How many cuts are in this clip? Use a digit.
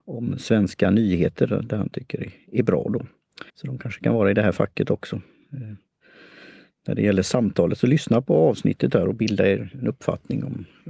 1